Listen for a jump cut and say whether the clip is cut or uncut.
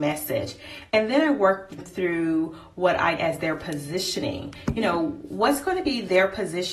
cut